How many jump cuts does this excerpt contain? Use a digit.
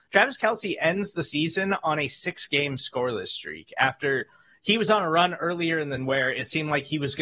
1